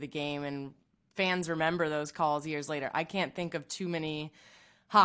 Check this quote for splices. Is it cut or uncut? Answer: uncut